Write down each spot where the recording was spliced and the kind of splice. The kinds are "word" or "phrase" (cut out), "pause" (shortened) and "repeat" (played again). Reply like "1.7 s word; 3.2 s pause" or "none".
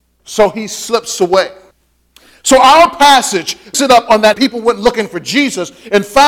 1.7 s pause; 3.7 s word; 4.3 s phrase